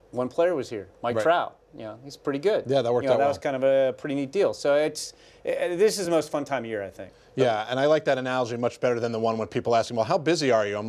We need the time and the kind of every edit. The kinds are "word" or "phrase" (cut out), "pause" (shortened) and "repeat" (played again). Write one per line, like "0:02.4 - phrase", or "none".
none